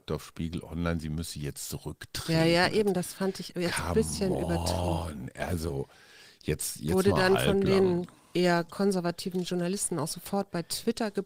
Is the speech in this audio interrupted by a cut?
no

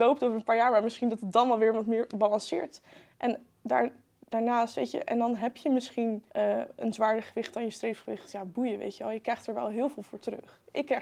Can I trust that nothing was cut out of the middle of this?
no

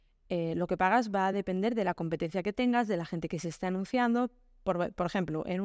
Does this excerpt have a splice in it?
no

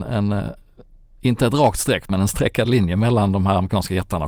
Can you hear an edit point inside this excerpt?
no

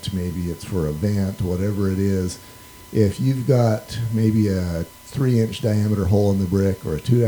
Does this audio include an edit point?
no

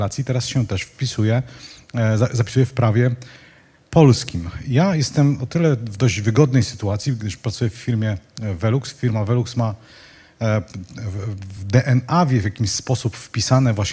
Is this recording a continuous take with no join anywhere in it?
yes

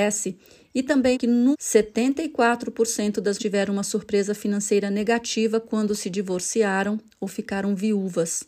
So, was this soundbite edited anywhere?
yes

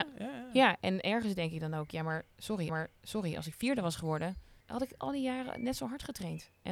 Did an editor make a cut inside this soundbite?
yes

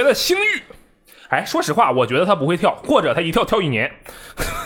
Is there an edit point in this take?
no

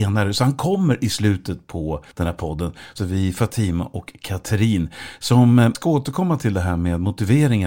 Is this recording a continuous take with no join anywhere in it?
no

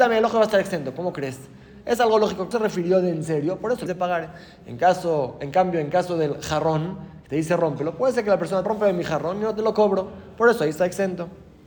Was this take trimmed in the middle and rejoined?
yes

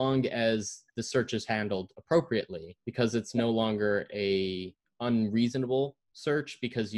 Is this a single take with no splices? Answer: no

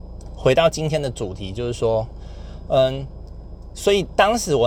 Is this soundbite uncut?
yes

